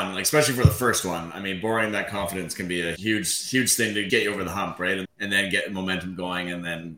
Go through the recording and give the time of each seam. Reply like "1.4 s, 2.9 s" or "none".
3.0 s, 4.1 s, 5.0 s